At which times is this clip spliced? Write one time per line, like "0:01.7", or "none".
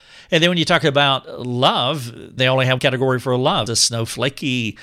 0:02.4
0:02.8
0:03.7